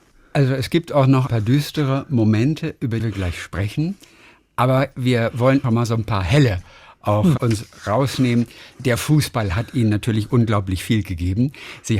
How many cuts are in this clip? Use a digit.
4